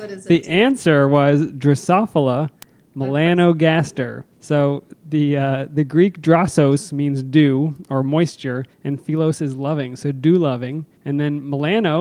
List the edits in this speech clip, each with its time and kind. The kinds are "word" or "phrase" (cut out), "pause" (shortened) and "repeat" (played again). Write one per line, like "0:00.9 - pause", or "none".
0:04.3 - pause
0:08.7 - pause
0:11.0 - pause